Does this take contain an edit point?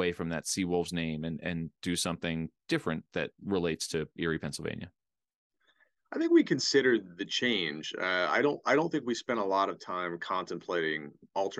no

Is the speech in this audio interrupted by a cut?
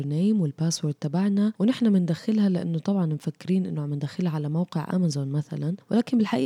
no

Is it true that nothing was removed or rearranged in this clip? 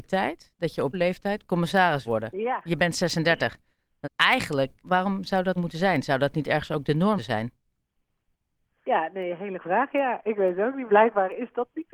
no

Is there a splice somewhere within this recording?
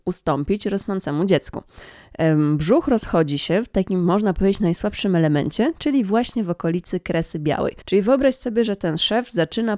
yes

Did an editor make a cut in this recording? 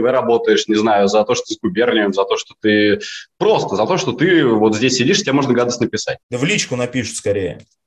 yes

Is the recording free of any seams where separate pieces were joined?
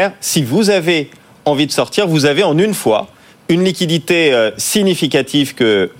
yes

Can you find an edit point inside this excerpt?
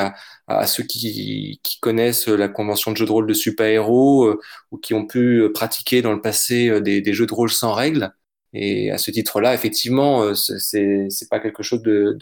no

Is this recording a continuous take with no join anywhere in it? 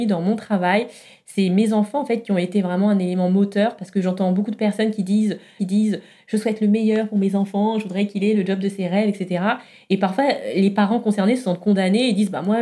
no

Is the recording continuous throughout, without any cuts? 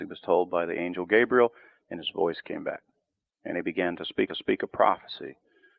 no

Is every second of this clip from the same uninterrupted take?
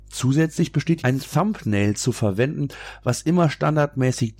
no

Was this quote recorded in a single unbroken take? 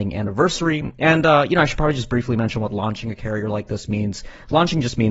yes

